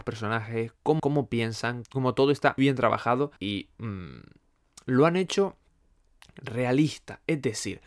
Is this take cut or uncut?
cut